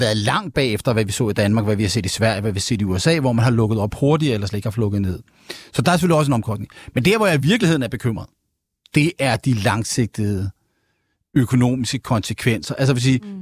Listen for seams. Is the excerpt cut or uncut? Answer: uncut